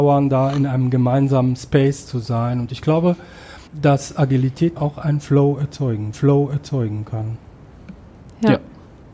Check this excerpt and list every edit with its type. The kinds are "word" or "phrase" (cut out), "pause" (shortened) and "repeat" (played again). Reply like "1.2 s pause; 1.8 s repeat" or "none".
3.7 s pause; 4.8 s word; 6.1 s repeat